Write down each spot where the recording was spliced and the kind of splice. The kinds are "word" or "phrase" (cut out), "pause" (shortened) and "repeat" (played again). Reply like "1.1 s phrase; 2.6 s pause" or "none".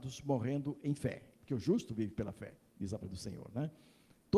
1.3 s pause; 2.7 s pause; 3.0 s word